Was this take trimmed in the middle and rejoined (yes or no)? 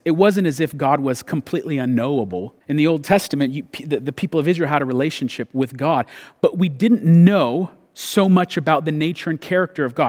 yes